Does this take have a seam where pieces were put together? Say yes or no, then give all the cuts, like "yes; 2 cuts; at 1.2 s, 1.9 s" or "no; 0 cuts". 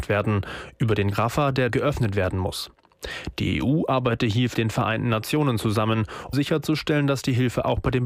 yes; 4 cuts; at 1.1 s, 1.7 s, 4.5 s, 6.3 s